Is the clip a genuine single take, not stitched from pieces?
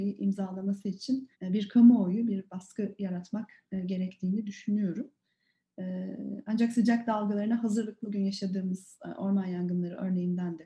no; 2 cuts; at 1.3 s, 8.0 s

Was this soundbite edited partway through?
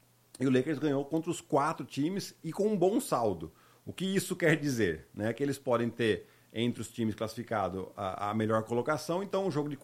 no; 0 cuts

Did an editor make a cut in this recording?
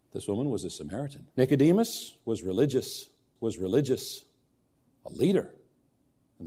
yes; 2 cuts; at 1.3 s, 3.4 s

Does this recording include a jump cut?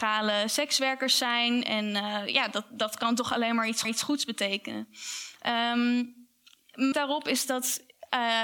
yes; 2 cuts; at 3.8 s, 6.9 s

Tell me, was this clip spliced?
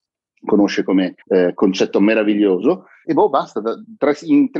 yes; 2 cuts; at 1.2 s, 3.0 s

